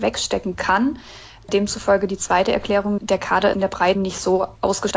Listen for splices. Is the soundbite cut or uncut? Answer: cut